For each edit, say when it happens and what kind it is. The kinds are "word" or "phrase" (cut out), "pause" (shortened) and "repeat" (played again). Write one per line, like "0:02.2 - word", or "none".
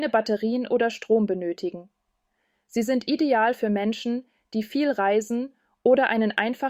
none